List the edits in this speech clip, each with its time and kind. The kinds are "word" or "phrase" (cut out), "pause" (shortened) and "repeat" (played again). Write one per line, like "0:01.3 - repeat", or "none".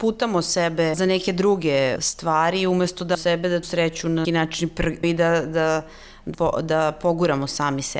0:00.9 - word
0:02.0 - word
0:03.1 - word
0:03.6 - word
0:04.2 - word
0:05.0 - word
0:06.3 - word

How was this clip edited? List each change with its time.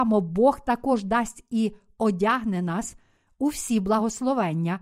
none

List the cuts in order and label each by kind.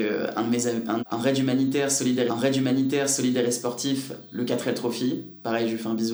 0:01.0 - phrase
0:02.3 - repeat

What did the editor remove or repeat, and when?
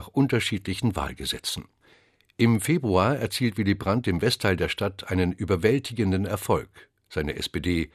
none

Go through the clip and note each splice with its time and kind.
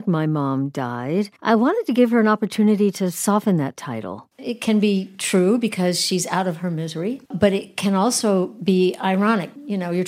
0:01.4 - pause
0:04.3 - pause
0:07.3 - pause

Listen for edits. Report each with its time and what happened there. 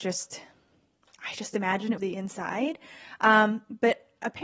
0:02.0 - phrase

